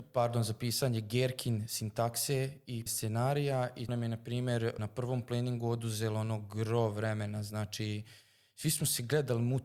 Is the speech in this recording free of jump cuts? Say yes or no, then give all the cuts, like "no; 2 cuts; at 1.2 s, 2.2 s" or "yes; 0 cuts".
no; 3 cuts; at 2.9 s, 3.9 s, 4.8 s